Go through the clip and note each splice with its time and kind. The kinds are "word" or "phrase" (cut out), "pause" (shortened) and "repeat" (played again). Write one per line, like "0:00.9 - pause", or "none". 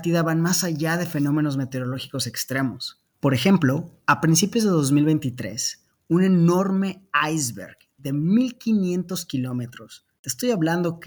0:03.1 - pause
0:10.2 - pause